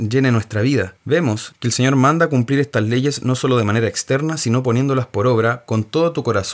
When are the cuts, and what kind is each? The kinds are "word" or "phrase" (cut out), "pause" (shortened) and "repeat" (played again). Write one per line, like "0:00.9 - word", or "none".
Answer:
none